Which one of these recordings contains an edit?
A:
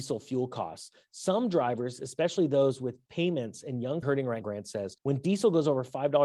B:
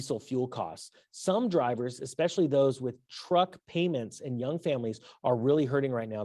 A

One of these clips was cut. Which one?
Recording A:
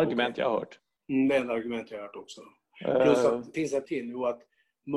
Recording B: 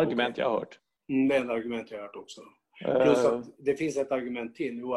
A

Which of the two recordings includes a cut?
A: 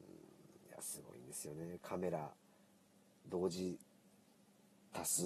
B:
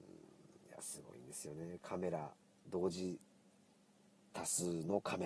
B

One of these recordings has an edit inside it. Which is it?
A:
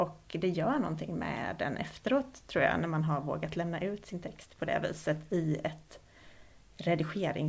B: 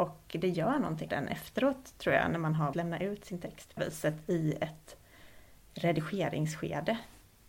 B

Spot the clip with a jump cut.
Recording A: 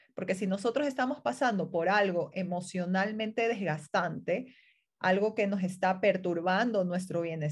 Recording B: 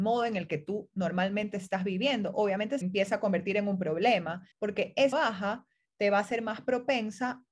B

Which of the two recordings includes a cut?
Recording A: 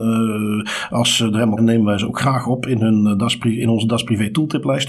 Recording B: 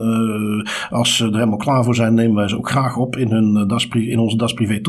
A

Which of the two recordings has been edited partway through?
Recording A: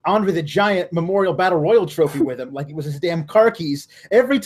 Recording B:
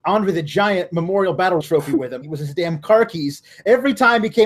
B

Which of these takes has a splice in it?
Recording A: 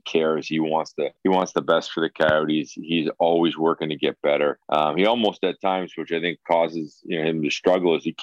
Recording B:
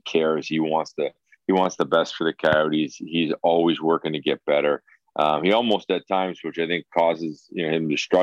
A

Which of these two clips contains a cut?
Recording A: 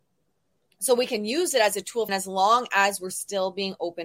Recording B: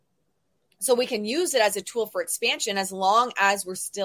A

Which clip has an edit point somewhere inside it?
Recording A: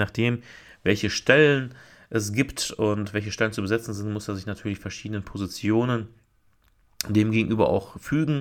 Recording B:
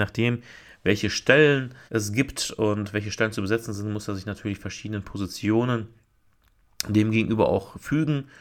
B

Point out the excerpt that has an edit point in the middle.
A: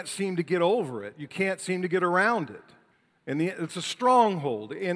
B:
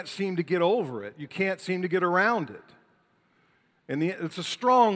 A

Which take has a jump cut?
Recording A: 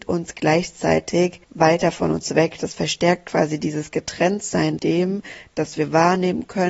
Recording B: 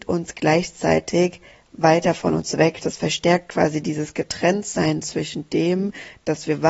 A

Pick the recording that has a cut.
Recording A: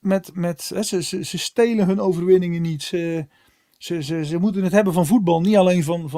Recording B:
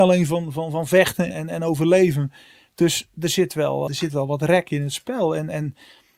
B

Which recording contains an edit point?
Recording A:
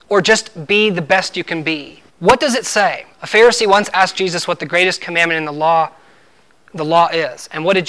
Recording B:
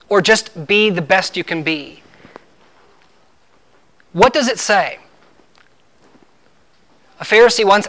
A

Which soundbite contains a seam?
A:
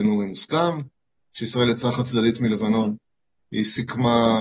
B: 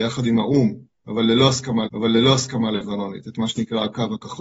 B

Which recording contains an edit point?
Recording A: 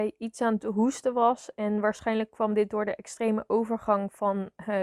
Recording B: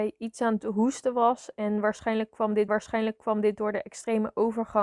B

